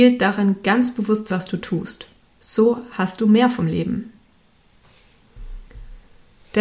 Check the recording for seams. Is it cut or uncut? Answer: cut